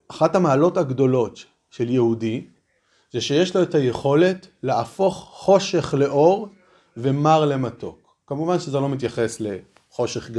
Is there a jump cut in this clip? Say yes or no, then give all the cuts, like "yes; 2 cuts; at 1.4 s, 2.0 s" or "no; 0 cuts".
no; 0 cuts